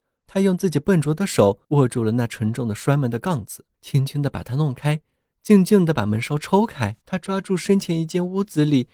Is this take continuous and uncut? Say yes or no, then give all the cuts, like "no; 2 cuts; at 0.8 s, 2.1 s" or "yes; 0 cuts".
no; 3 cuts; at 1.6 s, 3.7 s, 7.0 s